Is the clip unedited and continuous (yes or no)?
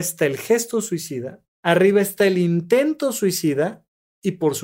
no